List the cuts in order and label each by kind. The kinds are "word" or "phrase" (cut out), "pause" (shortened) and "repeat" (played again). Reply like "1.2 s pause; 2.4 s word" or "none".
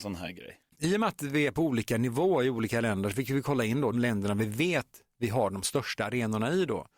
3.9 s word